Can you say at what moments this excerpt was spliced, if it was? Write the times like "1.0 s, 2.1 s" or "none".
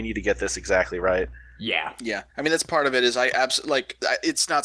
2.3 s